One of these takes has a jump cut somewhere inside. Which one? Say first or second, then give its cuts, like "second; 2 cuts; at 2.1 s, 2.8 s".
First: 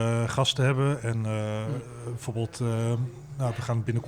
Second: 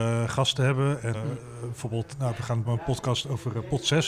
second; 3 cuts; at 1.1 s, 2.1 s, 2.7 s